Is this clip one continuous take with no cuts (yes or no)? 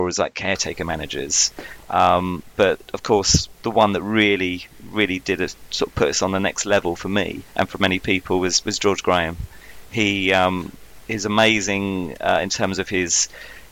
no